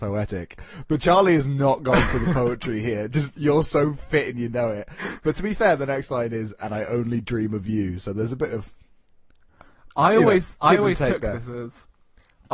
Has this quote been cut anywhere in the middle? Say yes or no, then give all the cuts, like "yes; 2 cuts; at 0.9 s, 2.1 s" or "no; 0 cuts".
no; 0 cuts